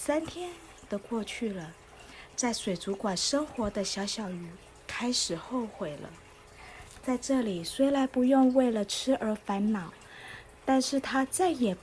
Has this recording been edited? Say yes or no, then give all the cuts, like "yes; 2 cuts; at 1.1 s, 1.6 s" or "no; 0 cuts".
no; 0 cuts